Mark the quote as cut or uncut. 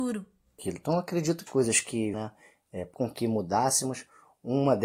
cut